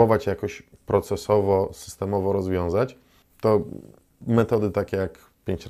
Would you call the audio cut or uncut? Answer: uncut